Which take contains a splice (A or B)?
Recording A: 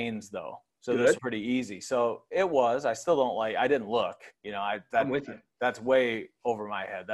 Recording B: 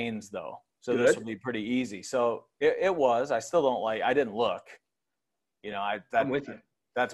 A